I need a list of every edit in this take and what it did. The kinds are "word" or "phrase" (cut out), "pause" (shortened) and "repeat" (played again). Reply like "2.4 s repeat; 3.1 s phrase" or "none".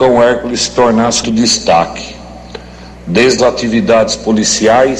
1.2 s phrase; 3.4 s word